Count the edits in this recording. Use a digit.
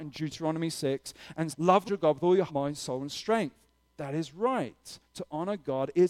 3